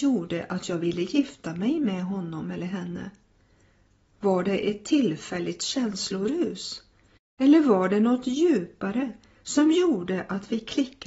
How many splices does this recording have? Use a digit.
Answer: 0